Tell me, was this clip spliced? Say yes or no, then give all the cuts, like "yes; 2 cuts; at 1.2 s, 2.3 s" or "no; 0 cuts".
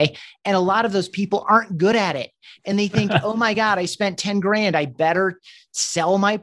no; 0 cuts